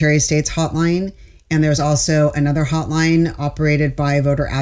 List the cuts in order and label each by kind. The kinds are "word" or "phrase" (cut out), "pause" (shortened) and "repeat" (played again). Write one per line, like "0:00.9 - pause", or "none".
none